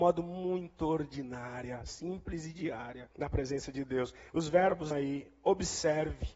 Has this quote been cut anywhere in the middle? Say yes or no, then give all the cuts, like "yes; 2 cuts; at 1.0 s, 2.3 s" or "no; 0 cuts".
yes; 2 cuts; at 3.1 s, 4.9 s